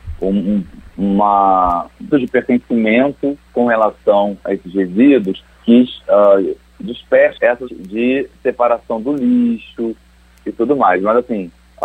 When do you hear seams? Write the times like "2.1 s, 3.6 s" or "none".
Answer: 2.1 s, 5.5 s, 7.4 s, 7.7 s